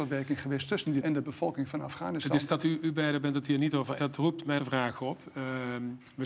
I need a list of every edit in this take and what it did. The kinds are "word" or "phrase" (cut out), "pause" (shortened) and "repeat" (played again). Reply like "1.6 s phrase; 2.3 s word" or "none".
1.0 s word; 2.5 s word; 4.0 s word; 4.6 s word